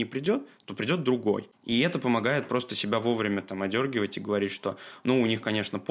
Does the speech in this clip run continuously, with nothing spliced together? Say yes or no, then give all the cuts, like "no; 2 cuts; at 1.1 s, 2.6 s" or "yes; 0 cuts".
yes; 0 cuts